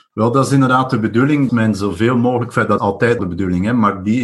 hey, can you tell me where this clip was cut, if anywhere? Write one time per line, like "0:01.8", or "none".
0:01.5
0:02.8
0:03.2